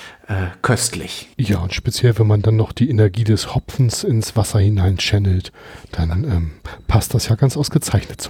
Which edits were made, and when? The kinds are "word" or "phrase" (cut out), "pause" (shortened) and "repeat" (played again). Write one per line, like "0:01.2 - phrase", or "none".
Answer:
0:01.3 - pause